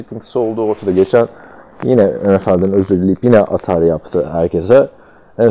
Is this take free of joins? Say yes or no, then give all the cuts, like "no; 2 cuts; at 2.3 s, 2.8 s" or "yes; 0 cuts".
yes; 0 cuts